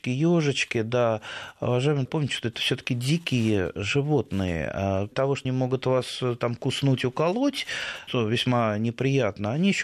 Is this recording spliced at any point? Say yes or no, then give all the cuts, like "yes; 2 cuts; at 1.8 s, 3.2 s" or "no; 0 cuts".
yes; 4 cuts; at 2.1 s, 5.1 s, 5.4 s, 8.1 s